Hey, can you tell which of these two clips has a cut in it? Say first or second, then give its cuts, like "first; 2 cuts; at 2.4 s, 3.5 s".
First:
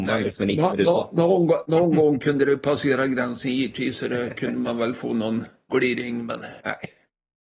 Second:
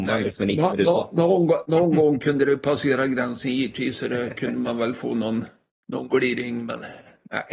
first; 2 cuts; at 5.7 s, 6.6 s